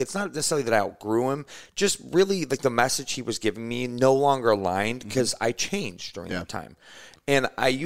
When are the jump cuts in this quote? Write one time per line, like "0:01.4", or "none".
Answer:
none